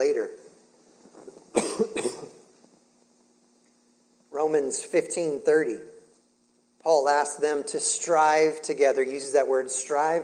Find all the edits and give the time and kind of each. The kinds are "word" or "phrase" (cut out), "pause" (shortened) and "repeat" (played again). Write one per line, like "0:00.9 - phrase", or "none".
none